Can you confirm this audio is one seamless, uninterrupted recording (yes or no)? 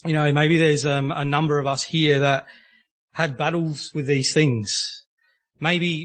yes